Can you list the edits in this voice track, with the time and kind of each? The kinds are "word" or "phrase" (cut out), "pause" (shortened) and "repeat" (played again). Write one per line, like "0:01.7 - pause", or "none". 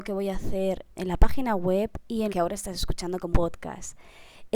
0:00.9 - word
0:02.3 - word
0:03.3 - word